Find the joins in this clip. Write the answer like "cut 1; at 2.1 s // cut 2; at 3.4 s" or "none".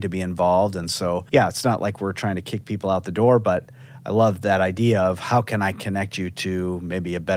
cut 1; at 1.3 s

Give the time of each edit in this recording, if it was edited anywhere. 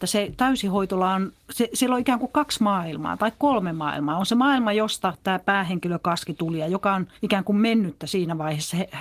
cut 1; at 1.4 s // cut 2; at 7.2 s

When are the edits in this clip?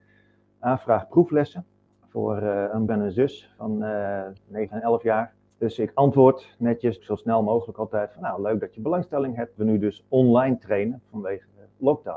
cut 1; at 1.9 s // cut 2; at 2.9 s // cut 3; at 4.4 s // cut 4; at 5.5 s // cut 5; at 7.0 s // cut 6; at 9.6 s

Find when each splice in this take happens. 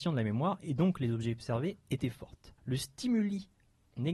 cut 1; at 2.6 s

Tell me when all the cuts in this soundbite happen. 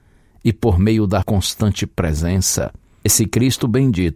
cut 1; at 1.2 s // cut 2; at 3.1 s

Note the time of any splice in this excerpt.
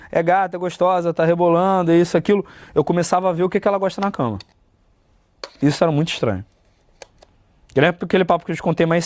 none

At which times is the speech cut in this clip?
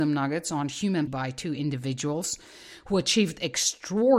cut 1; at 1.1 s

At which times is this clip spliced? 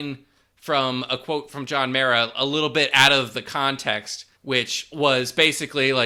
cut 1; at 4.4 s

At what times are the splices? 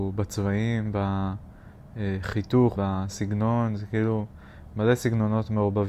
cut 1; at 2.8 s

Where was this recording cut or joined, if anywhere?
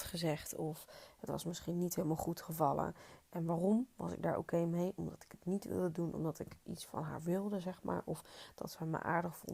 none

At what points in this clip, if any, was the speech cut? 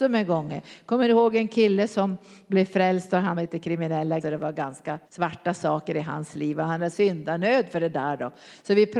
cut 1; at 3.3 s // cut 2; at 4.2 s // cut 3; at 5.1 s // cut 4; at 6.9 s

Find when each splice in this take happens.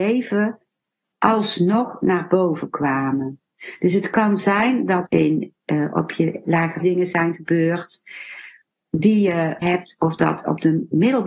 cut 1; at 5.1 s // cut 2; at 6.8 s // cut 3; at 9.6 s

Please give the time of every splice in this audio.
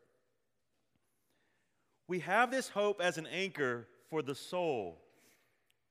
none

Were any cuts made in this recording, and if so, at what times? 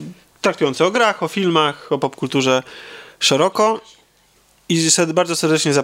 none

